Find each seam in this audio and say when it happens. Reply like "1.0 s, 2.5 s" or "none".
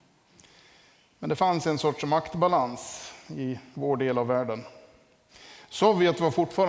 none